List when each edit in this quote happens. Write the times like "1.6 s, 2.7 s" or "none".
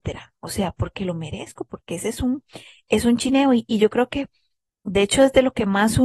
none